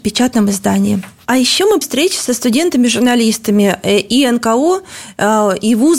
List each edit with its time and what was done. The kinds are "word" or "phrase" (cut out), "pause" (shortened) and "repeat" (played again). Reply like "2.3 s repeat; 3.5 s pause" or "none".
1.8 s word